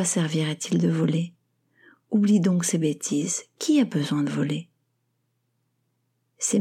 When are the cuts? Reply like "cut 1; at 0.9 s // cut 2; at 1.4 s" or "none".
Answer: none